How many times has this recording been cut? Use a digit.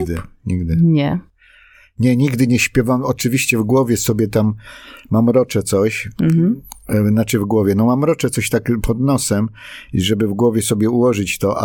0